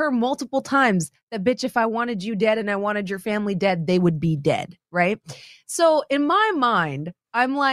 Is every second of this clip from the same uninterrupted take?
yes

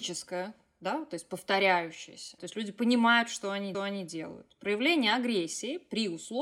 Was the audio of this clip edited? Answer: yes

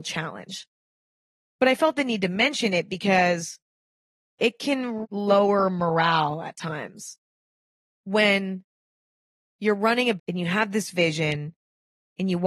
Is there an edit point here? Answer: yes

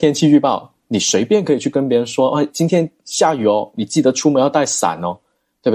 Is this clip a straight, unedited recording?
yes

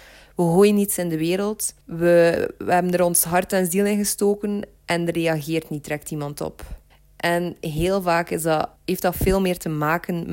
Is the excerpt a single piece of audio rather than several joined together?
no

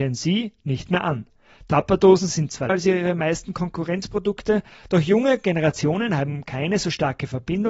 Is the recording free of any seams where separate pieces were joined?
no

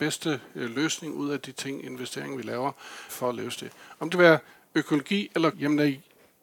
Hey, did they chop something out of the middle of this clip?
yes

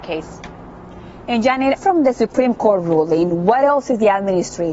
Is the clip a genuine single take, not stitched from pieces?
no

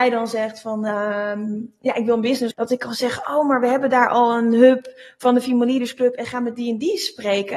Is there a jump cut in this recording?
yes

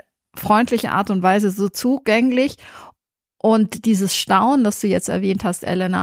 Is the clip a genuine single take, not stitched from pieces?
yes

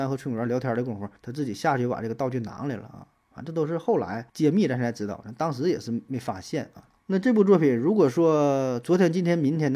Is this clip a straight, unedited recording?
no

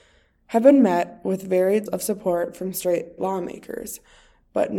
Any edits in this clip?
yes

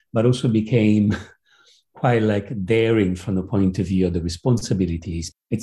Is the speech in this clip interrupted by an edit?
no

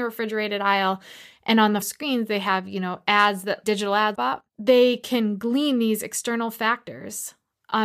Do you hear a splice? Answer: yes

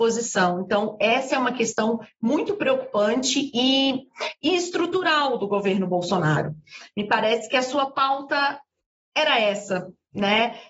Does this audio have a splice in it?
no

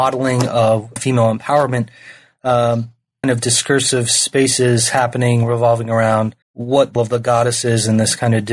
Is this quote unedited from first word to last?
no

